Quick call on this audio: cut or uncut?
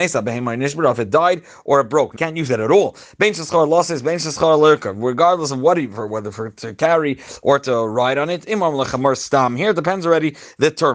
cut